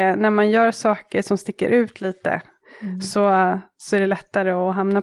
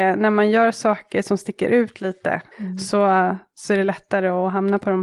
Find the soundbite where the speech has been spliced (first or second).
second